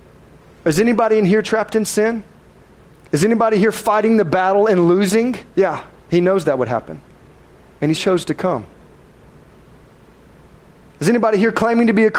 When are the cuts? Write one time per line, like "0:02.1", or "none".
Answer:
0:02.9
0:05.5
0:07.9